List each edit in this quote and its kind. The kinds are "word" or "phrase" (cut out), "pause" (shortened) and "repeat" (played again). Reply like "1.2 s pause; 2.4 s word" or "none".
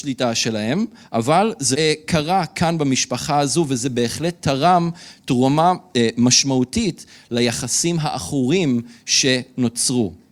1.7 s word